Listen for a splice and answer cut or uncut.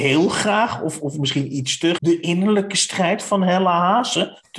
cut